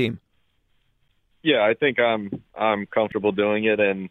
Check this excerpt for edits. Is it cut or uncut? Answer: uncut